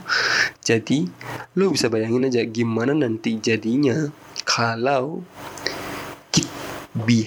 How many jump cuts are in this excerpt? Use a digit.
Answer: 0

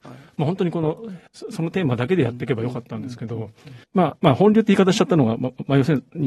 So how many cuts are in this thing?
2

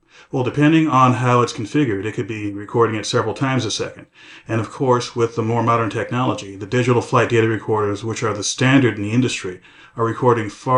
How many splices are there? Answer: 0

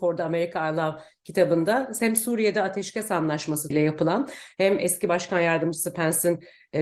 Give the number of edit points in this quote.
1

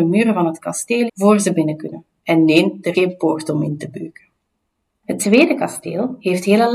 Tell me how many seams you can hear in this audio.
2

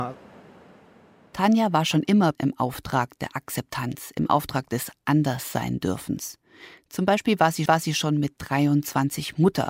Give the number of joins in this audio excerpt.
2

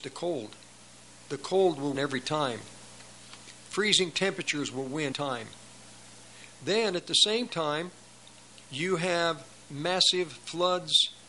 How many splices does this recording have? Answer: 4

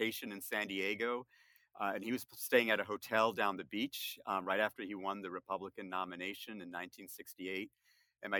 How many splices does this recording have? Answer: 0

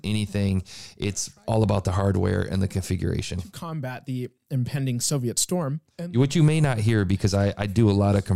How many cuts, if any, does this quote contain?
1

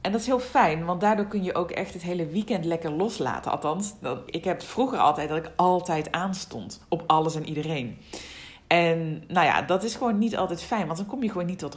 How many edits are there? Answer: 1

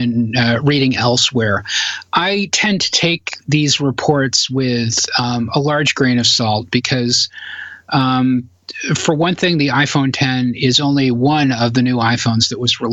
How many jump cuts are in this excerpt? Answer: 0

